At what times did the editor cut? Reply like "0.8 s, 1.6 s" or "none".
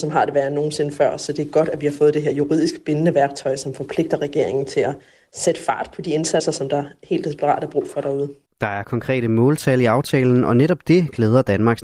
none